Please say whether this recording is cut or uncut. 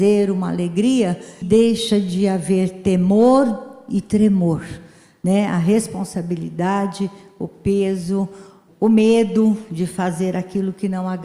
cut